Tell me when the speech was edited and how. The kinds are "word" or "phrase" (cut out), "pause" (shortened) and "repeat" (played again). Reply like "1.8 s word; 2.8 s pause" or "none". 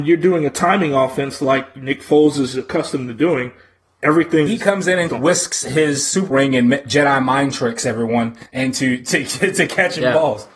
4.5 s phrase; 5.1 s word; 6.3 s word; 8.5 s pause

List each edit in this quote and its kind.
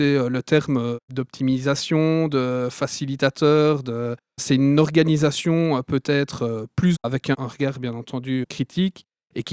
1.0 s pause; 4.4 s word; 6.9 s phrase

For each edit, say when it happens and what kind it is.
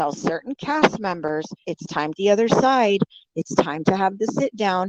1.6 s word; 2.1 s phrase

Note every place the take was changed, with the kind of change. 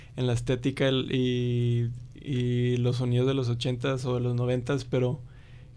none

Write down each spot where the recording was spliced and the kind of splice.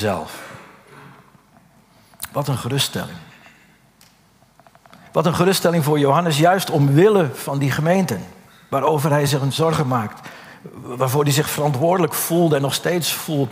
none

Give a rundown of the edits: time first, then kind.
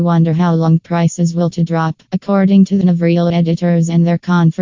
1.5 s word; 2.1 s pause; 2.8 s phrase; 3.3 s word

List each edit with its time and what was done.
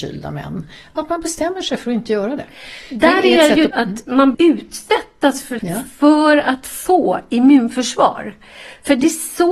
3.7 s word; 4.3 s word; 5.6 s word

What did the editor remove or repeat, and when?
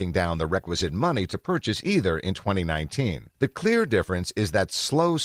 3.3 s pause

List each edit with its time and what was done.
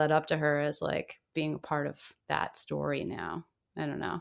2.2 s pause

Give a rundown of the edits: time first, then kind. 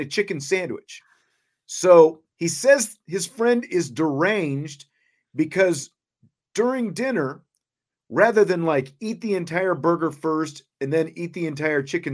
2.3 s pause; 10.7 s pause

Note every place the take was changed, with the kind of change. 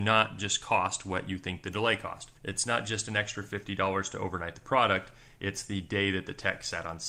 2.4 s pause

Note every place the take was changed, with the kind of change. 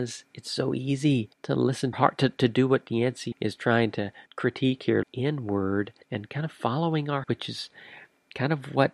1.3 s pause; 1.9 s phrase; 3.3 s word; 4.3 s pause; 5.0 s word; 6.0 s pause; 7.2 s word

